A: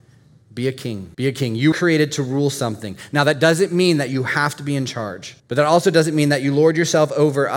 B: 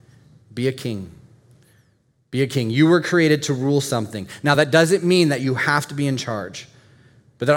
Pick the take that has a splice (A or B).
A